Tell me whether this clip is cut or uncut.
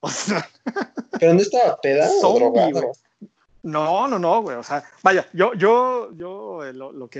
uncut